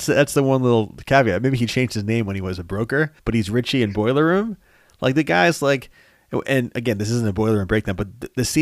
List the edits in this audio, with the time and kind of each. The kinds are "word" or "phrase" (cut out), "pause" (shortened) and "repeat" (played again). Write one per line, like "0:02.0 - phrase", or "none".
0:03.2 - pause